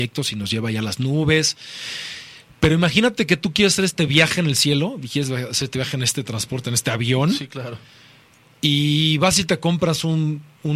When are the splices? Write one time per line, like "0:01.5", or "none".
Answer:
none